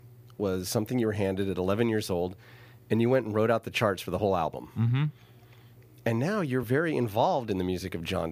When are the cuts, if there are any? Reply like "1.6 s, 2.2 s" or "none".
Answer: none

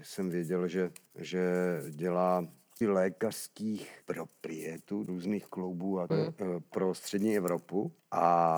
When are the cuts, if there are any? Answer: 2.8 s, 5.1 s, 5.5 s, 6.1 s

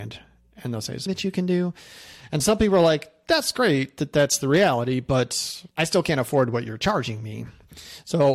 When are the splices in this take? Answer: 1.1 s, 5.7 s

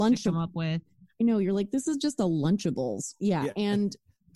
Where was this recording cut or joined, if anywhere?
none

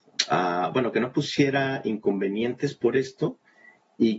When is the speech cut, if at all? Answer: none

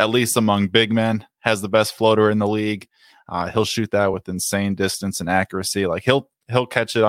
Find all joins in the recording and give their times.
none

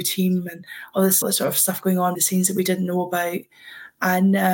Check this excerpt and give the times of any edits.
1.2 s, 2.1 s

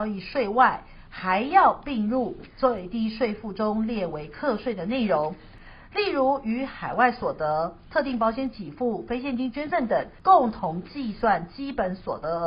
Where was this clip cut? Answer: 10.2 s

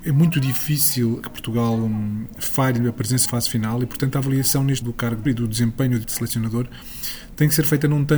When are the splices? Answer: 1.2 s, 3.3 s, 4.8 s, 5.3 s, 6.0 s

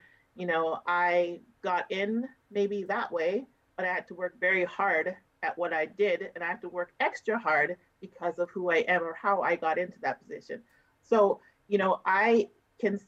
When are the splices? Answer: none

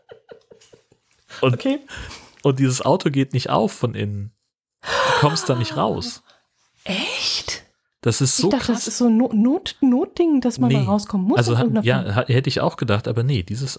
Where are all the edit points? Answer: none

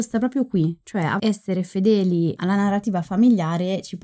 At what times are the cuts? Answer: 1.2 s

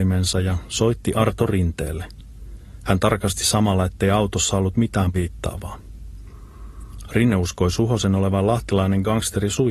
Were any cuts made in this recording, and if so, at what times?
5.1 s

